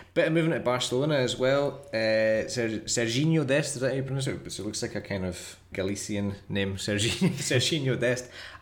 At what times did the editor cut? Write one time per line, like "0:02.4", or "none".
0:05.7